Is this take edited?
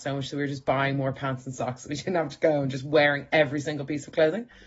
no; 0 cuts

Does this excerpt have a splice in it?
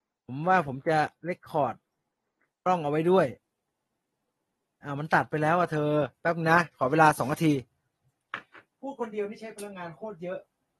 yes; 1 cut; at 1.2 s

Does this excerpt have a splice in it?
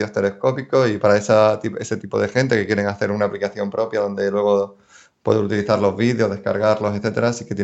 no; 0 cuts

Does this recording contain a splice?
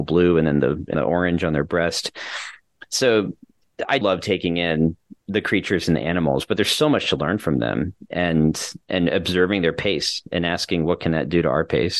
yes; 3 cuts; at 0.9 s, 4.0 s, 5.2 s

